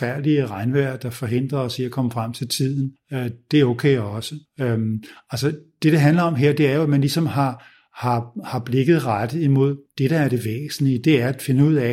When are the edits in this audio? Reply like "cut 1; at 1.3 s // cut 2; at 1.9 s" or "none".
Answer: none